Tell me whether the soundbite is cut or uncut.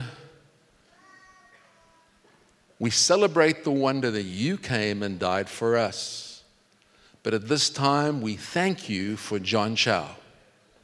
uncut